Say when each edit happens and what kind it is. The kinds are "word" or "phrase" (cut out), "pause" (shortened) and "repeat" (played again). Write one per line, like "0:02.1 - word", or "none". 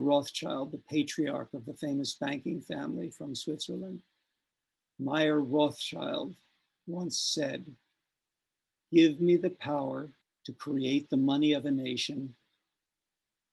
0:10.2 - pause